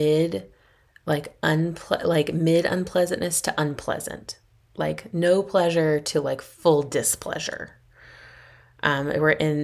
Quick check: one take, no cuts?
yes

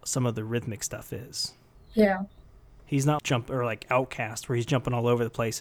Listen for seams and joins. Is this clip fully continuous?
no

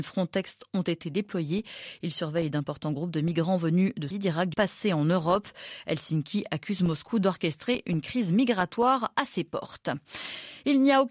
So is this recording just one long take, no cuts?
no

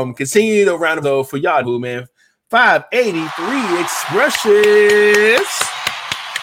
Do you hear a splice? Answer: yes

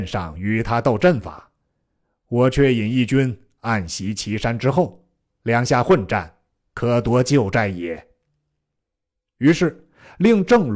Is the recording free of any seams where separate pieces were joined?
yes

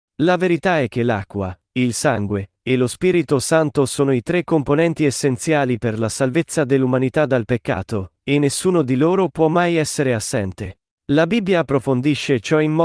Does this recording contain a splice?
yes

